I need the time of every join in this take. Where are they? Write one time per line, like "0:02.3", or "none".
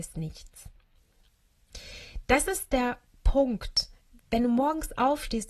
0:04.2